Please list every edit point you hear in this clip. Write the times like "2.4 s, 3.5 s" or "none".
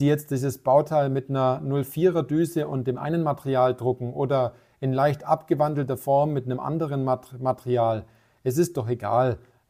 none